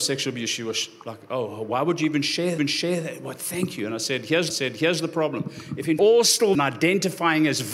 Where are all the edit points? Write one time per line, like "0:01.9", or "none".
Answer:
0:02.6
0:04.5
0:06.0
0:06.5